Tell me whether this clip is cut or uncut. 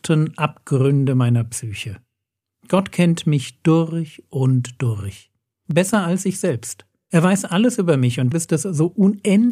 cut